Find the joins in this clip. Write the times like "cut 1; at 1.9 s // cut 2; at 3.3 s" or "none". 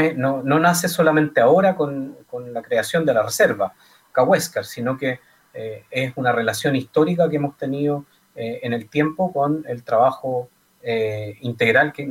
none